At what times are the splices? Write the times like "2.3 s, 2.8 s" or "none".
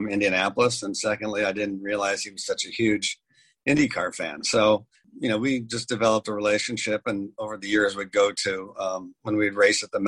none

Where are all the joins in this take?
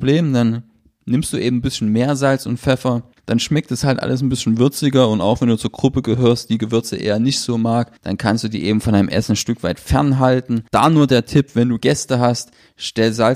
3.1 s, 8.0 s, 10.7 s

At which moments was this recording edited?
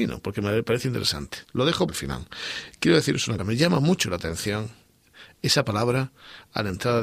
1.4 s, 1.9 s, 3.4 s

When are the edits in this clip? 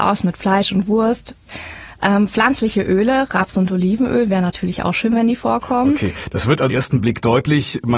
6.7 s

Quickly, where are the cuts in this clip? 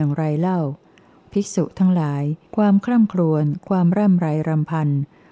2.4 s

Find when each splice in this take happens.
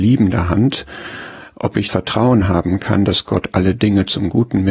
1.9 s

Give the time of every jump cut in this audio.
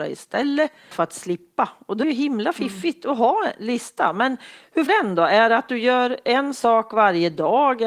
0.9 s, 2.0 s, 4.9 s

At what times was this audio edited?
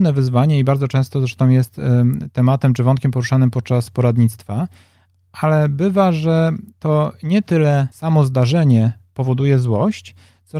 none

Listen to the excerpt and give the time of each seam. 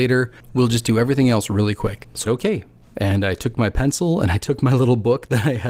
2.3 s

